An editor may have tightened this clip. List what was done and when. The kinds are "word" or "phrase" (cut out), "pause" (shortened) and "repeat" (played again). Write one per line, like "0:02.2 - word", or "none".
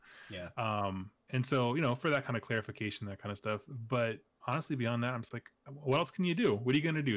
0:01.2 - pause
0:04.3 - pause